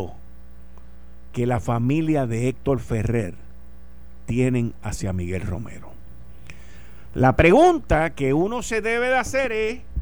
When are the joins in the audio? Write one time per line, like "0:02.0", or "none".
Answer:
none